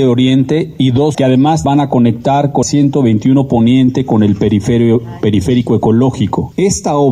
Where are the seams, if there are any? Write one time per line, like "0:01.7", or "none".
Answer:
0:01.1
0:01.6
0:02.6